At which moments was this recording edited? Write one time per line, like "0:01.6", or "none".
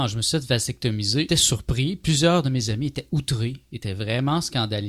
0:01.3